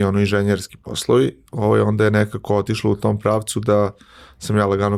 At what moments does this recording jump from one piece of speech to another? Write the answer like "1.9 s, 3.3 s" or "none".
none